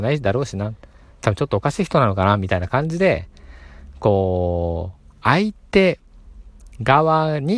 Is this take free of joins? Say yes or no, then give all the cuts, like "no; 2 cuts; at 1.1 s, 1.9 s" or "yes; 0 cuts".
yes; 0 cuts